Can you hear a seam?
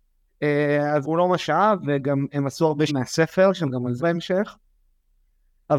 yes; 3 cuts; at 1.0 s, 2.9 s, 4.0 s

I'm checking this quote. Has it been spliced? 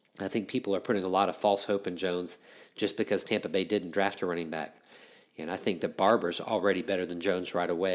no; 0 cuts

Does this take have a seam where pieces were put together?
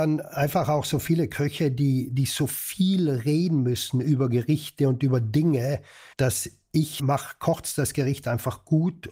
yes; 2 cuts; at 6.1 s, 7.0 s

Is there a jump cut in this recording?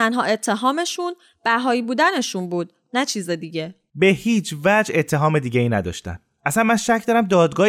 no; 0 cuts

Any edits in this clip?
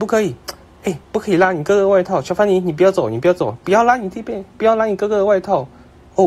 yes; 1 cut; at 1.0 s

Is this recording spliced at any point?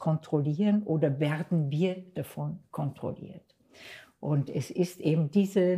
no; 0 cuts

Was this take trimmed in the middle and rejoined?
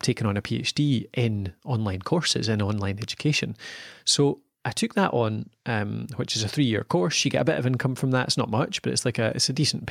no; 0 cuts

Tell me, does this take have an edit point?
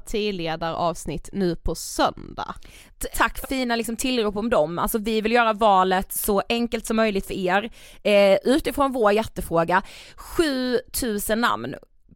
yes; 2 cuts; at 3.1 s, 3.4 s

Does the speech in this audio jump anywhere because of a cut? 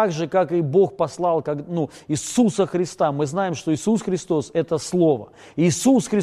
no; 0 cuts

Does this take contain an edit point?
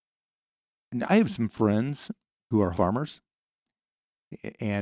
yes; 2 cuts; at 1.1 s, 2.7 s

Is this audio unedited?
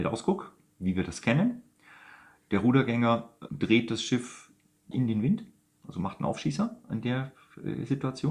no; 2 cuts; at 3.5 s, 4.9 s

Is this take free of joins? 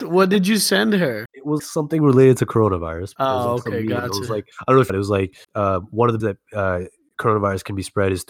no; 7 cuts; at 1.3 s, 1.6 s, 3.2 s, 4.5 s, 4.9 s, 5.4 s, 6.2 s

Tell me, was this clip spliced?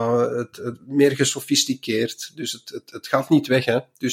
no; 0 cuts

